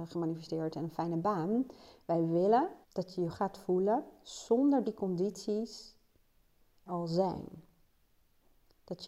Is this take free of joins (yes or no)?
no